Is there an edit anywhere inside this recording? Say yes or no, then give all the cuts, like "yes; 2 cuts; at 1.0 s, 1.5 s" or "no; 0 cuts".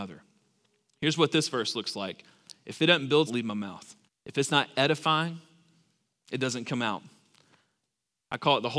yes; 2 cuts; at 3.3 s, 4.1 s